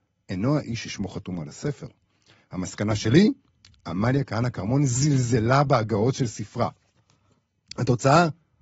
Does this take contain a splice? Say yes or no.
no